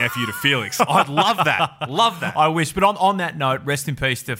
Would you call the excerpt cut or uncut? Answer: uncut